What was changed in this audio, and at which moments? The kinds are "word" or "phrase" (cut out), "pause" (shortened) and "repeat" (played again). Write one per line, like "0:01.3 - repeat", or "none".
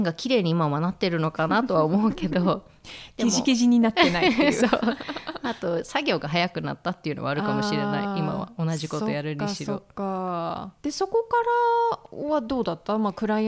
0:10.8 - pause